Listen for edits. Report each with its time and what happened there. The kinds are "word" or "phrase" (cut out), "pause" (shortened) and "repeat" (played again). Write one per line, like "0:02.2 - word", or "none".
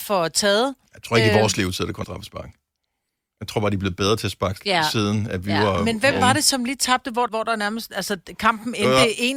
0:02.0 - phrase
0:04.6 - word
0:07.3 - phrase